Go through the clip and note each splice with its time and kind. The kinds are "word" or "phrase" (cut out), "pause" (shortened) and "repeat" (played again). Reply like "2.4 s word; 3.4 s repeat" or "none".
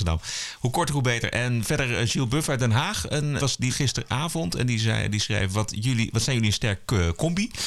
3.4 s word; 3.7 s word